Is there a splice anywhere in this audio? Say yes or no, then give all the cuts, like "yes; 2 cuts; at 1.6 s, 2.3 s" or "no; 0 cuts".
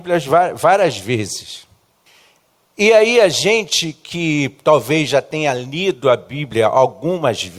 yes; 1 cut; at 2.1 s